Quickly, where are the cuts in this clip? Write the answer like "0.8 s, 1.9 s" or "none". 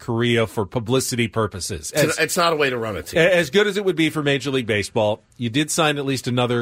none